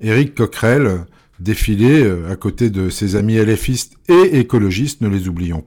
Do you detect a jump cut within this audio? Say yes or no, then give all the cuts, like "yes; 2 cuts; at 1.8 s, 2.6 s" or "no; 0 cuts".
no; 0 cuts